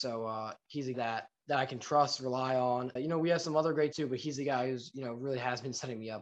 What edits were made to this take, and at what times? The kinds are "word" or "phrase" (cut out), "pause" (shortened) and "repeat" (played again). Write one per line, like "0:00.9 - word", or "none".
0:00.9 - word
0:01.4 - word
0:03.0 - word
0:03.9 - word